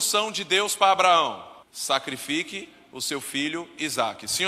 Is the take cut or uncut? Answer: cut